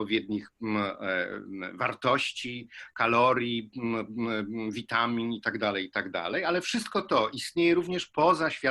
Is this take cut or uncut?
uncut